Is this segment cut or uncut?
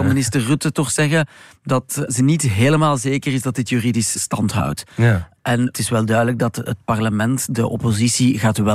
uncut